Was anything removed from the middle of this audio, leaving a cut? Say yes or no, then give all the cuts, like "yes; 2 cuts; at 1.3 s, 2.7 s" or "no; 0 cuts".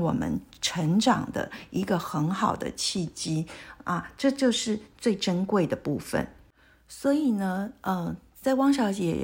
no; 0 cuts